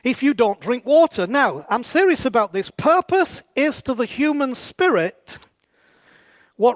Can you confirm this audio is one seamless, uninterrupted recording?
yes; 0 cuts

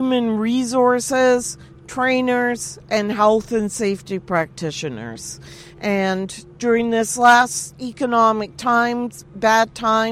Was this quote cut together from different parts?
no; 0 cuts

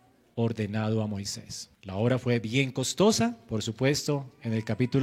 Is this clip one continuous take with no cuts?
no; 1 cut; at 1.7 s

